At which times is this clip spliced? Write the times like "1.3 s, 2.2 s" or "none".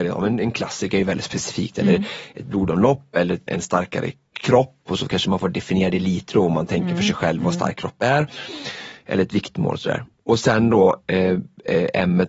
3.5 s